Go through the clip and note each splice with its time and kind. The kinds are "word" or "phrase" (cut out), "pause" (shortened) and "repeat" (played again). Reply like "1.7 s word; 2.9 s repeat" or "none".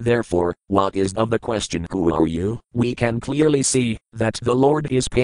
1.2 s word; 2.6 s pause